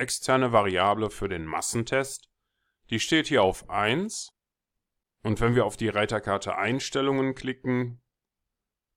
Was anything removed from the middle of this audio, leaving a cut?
no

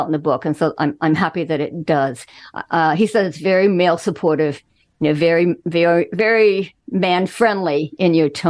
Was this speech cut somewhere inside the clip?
no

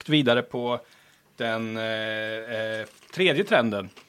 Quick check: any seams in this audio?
no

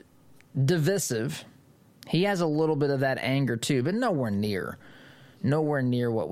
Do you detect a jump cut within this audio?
no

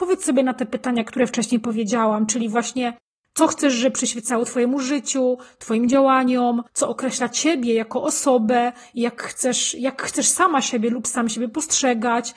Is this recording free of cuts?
no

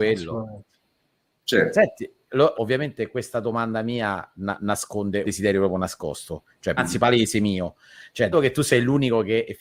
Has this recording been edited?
yes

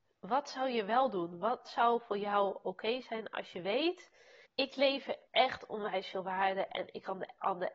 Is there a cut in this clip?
yes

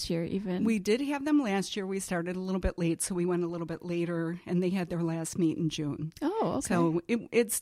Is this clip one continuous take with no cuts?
yes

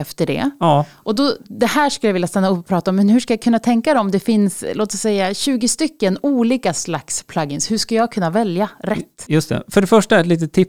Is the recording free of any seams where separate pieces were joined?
yes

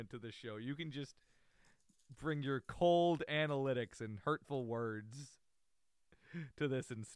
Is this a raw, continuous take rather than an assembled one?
yes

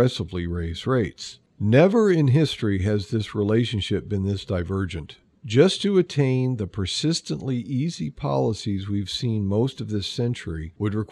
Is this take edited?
no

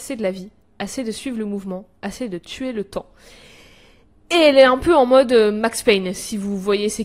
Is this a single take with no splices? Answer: yes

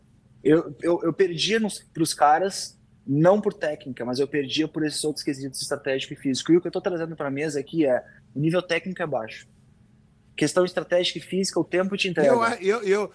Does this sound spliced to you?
yes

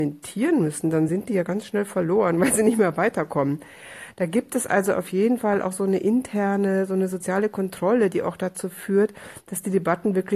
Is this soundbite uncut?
yes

